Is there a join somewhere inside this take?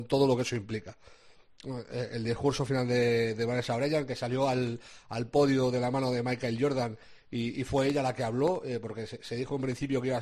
no; 0 cuts

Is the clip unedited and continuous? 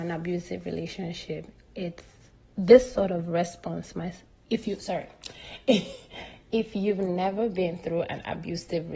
yes; 0 cuts

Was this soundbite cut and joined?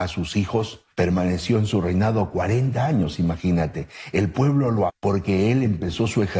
yes; 2 cuts; at 0.9 s, 4.9 s

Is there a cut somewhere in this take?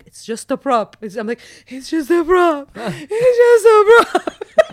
no; 0 cuts

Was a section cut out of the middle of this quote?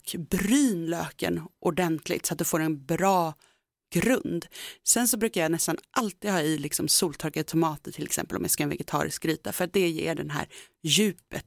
no; 0 cuts

